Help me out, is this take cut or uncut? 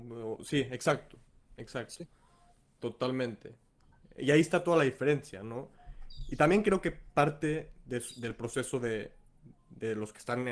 uncut